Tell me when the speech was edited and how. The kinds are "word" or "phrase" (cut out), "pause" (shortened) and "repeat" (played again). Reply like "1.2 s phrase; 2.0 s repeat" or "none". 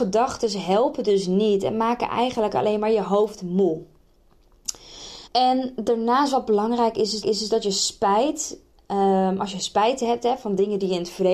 5.3 s pause; 7.2 s repeat